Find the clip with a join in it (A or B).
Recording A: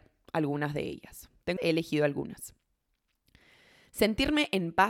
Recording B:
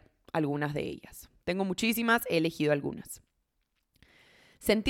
A